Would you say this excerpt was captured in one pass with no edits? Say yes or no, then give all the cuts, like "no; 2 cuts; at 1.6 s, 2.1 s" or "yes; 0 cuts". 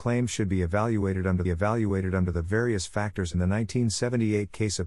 no; 2 cuts; at 1.4 s, 3.3 s